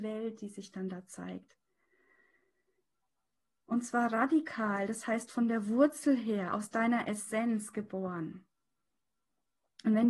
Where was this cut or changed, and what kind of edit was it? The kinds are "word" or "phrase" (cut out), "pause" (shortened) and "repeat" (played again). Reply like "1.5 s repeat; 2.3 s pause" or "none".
none